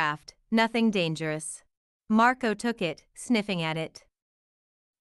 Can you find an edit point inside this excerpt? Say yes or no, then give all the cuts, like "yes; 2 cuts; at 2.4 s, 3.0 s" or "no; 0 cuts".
yes; 1 cut; at 1.8 s